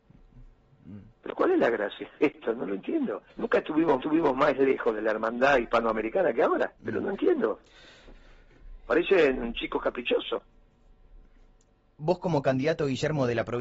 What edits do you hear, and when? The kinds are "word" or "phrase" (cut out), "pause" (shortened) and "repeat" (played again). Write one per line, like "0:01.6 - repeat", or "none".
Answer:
0:01.1 - pause
0:03.3 - pause
0:04.0 - repeat
0:06.8 - pause